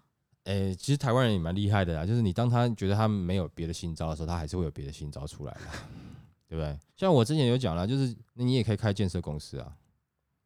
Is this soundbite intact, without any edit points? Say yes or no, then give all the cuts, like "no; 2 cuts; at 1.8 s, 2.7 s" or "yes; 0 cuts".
no; 2 cuts; at 6.9 s, 8.3 s